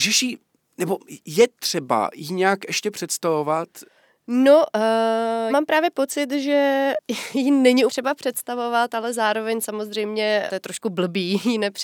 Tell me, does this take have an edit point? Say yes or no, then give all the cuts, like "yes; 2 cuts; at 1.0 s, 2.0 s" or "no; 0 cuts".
yes; 3 cuts; at 5.5 s, 7.9 s, 10.5 s